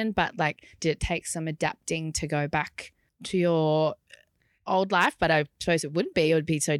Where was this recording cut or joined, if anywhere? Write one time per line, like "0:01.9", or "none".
0:03.1